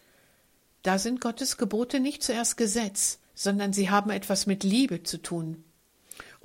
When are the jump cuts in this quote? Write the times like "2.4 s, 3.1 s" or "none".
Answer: 3.3 s